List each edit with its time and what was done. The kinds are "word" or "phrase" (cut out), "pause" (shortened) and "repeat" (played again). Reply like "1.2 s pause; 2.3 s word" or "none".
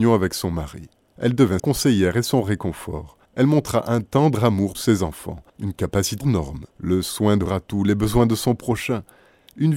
1.0 s pause; 1.6 s word; 3.3 s pause; 4.7 s phrase; 5.5 s pause; 6.2 s phrase; 6.7 s pause; 7.5 s word